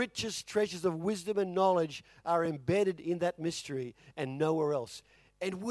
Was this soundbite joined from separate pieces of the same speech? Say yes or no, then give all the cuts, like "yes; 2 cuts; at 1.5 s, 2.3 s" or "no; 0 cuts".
no; 0 cuts